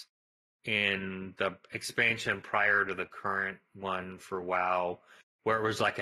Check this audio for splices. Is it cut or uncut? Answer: uncut